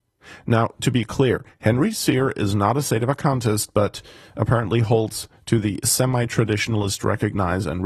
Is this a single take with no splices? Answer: yes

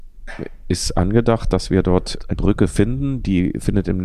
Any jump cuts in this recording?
yes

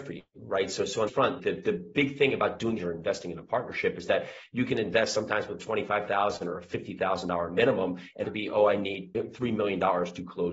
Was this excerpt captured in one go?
no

